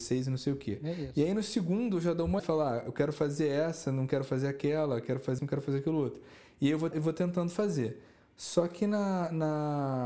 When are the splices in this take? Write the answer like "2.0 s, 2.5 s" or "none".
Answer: 2.4 s, 5.4 s, 6.9 s

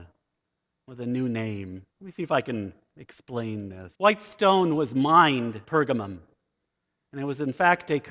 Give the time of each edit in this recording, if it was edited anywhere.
1.9 s, 4.0 s, 5.6 s

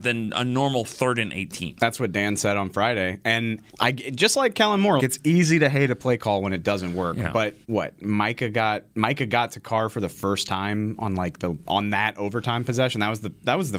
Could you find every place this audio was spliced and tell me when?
3.7 s, 5.0 s, 7.6 s, 8.9 s

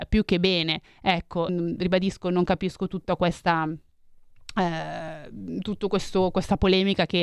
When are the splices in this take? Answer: 1.5 s

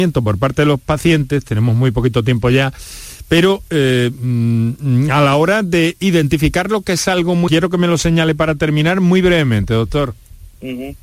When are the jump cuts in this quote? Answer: 7.5 s

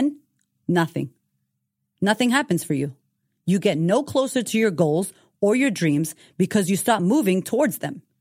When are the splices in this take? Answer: none

